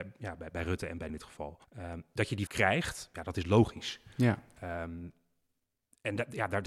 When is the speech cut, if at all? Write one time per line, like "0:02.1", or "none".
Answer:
0:01.1
0:01.6
0:02.5